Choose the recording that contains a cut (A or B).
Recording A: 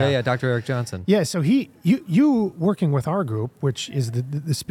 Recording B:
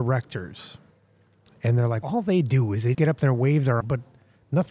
B